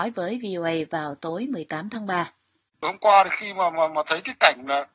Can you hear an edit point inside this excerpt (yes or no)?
yes